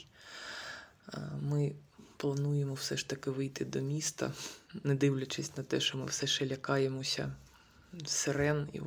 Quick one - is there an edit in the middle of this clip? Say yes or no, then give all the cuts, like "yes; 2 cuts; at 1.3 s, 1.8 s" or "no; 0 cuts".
no; 0 cuts